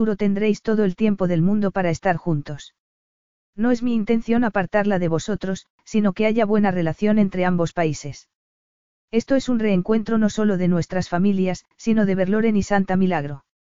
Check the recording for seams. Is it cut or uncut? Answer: cut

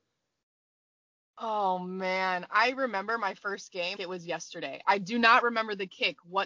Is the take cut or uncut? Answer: cut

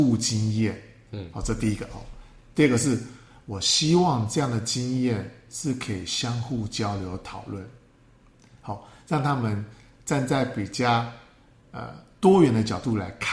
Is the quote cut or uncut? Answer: uncut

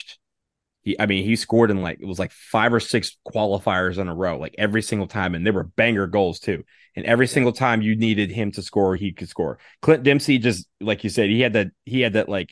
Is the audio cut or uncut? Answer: uncut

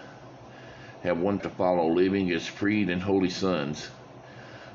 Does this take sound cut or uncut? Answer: cut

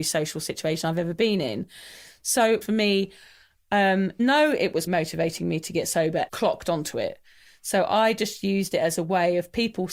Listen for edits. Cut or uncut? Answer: cut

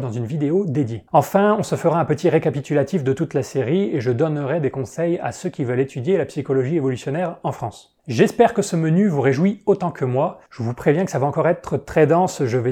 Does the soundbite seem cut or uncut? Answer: cut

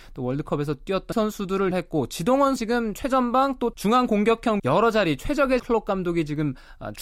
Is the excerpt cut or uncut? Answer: cut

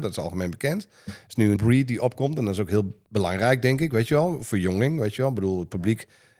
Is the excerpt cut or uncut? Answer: cut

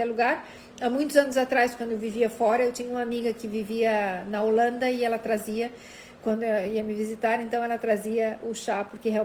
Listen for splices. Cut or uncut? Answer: uncut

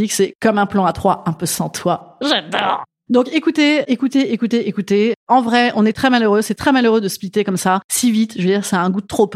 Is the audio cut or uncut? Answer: uncut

